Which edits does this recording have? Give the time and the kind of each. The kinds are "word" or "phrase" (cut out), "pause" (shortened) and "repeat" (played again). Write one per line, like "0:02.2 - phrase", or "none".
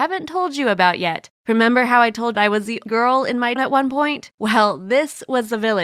0:01.4 - pause
0:02.3 - phrase
0:02.9 - word
0:03.6 - word
0:04.3 - pause